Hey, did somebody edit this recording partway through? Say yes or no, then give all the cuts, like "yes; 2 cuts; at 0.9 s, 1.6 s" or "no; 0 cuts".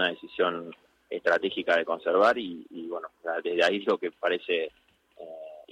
no; 0 cuts